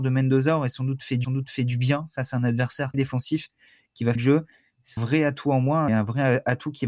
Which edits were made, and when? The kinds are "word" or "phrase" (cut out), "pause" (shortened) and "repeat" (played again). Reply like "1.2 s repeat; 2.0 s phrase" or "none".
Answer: 1.2 s repeat; 2.9 s word; 4.1 s word; 5.0 s word; 5.9 s word